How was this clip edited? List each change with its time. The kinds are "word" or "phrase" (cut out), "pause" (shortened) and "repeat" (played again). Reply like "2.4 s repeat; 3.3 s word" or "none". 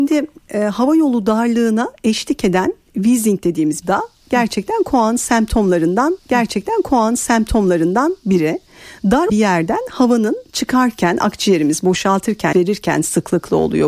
3.8 s phrase; 6.2 s repeat; 9.3 s word; 12.5 s word